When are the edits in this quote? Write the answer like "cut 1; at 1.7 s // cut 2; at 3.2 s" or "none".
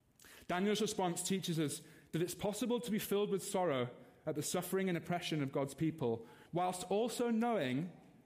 cut 1; at 6.5 s